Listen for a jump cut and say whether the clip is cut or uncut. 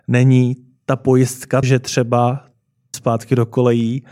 cut